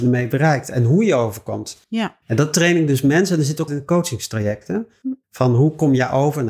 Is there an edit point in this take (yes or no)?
yes